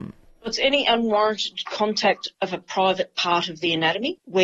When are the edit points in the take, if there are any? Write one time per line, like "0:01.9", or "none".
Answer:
none